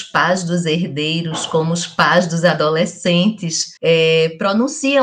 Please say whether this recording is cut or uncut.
cut